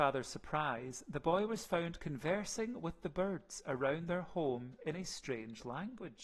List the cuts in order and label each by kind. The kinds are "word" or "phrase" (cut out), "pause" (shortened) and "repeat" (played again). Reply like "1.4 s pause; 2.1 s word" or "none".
none